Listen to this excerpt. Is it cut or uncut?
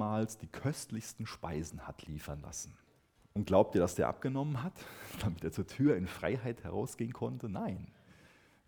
cut